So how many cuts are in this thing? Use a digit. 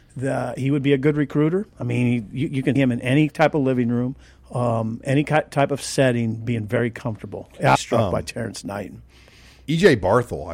4